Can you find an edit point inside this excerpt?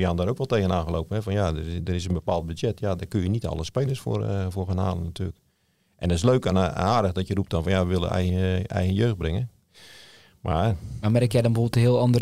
no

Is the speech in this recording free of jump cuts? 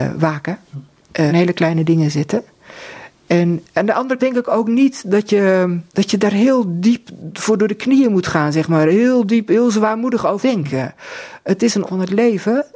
no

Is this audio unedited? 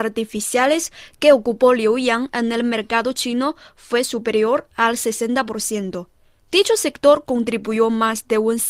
yes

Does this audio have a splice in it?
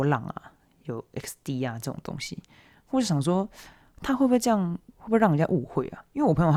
yes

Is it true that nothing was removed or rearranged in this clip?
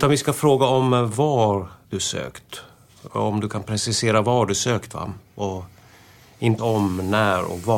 no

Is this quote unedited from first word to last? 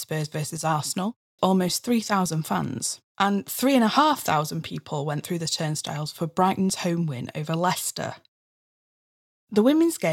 no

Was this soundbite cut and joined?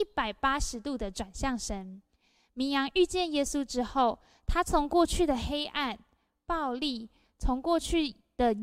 no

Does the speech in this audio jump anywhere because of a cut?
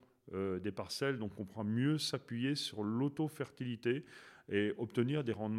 no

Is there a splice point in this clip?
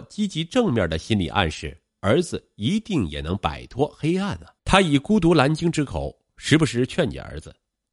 yes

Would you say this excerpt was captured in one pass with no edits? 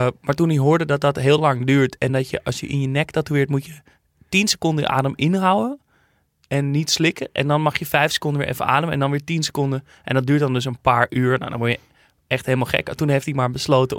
yes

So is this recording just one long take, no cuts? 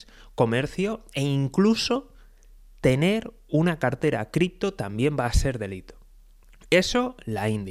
yes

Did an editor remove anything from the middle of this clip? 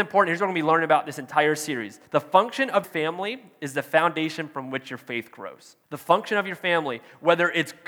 yes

